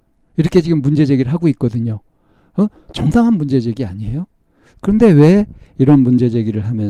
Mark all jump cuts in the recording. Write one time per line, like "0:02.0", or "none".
none